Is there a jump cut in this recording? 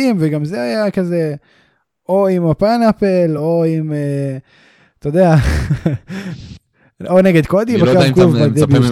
no; 0 cuts

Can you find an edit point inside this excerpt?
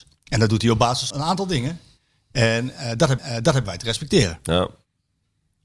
yes; 2 cuts; at 1.1 s, 3.2 s

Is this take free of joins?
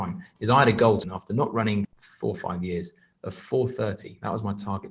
no; 2 cuts; at 1.0 s, 1.8 s

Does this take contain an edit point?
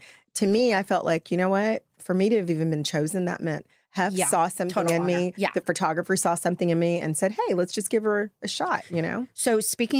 yes; 1 cut; at 1.9 s

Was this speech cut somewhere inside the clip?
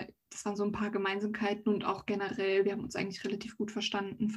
no; 0 cuts

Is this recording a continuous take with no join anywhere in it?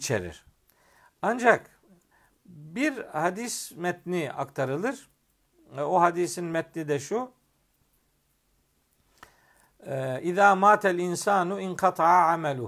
yes; 0 cuts

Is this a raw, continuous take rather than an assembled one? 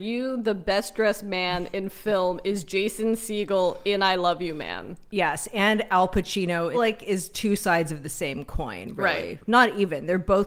no; 1 cut; at 6.7 s

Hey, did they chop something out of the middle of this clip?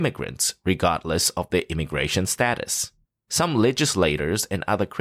yes; 1 cut; at 3.0 s

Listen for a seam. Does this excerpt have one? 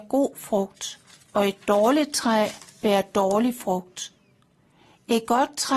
no; 0 cuts

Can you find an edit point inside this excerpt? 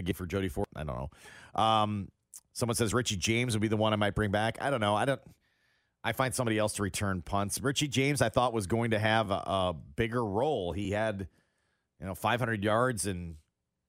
no; 0 cuts

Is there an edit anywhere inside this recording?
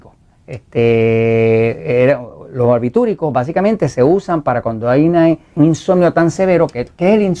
yes; 1 cut; at 5.6 s

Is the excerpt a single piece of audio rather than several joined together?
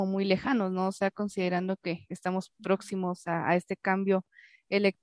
yes; 0 cuts

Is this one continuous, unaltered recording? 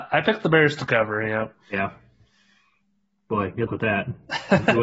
no; 1 cut; at 3.7 s

